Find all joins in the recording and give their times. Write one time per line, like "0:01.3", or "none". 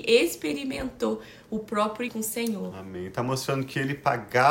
0:02.1